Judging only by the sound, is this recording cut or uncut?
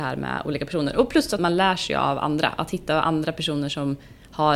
cut